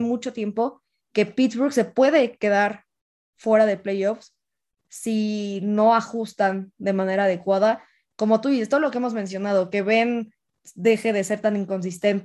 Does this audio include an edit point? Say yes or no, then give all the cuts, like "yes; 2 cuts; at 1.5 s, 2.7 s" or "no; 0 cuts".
no; 0 cuts